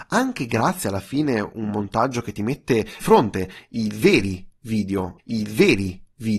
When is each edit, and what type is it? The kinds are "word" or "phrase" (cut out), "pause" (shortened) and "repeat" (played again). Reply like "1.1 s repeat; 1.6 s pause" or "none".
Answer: 3.0 s phrase; 5.2 s repeat

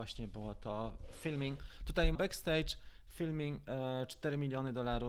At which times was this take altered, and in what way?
2.1 s word

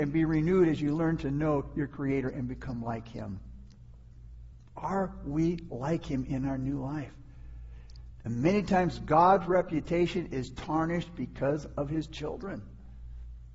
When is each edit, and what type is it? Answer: none

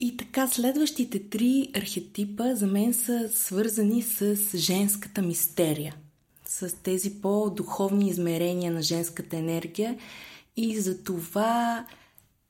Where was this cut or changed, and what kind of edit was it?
none

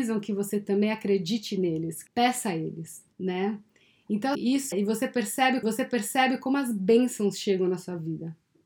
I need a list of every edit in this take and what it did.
2.1 s word; 3.1 s pause; 4.3 s word; 4.7 s word; 5.6 s repeat

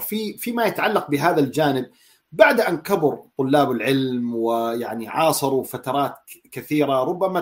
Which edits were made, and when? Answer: none

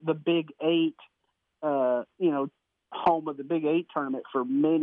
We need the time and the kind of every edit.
none

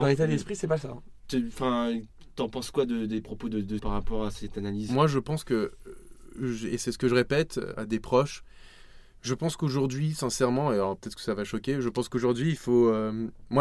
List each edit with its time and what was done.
3.8 s word; 7.7 s word

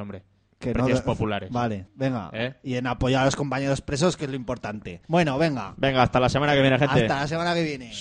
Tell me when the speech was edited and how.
1.9 s pause; 5.0 s pause

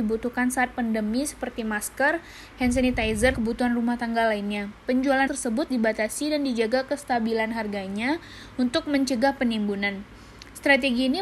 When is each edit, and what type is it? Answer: 3.3 s word; 5.3 s word; 5.7 s word

